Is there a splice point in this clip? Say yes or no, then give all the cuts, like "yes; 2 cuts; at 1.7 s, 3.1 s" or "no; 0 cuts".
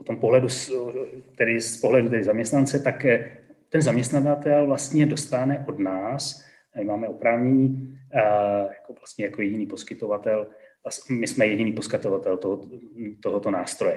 no; 0 cuts